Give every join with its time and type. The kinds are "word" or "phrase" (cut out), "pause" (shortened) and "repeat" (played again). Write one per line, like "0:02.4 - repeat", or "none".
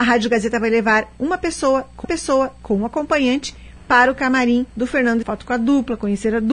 0:02.0 - repeat
0:04.7 - pause
0:05.2 - phrase